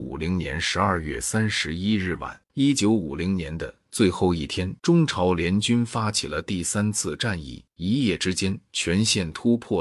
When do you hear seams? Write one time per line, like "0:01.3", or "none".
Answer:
0:02.4
0:04.8
0:07.7